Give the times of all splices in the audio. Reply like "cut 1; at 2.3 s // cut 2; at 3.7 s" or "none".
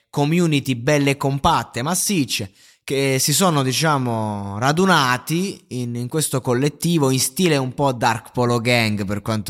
none